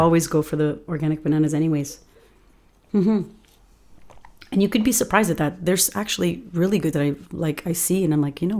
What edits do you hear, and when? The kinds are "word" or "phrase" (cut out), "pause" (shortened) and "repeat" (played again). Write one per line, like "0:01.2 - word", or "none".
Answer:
0:06.9 - word